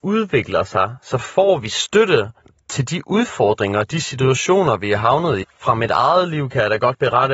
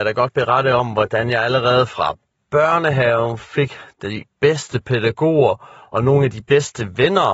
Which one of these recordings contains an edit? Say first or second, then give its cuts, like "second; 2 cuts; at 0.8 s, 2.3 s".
first; 1 cut; at 5.4 s